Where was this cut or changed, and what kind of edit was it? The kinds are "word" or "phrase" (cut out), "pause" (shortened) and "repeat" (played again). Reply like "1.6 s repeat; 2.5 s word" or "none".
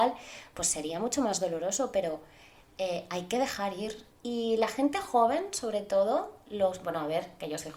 4.1 s pause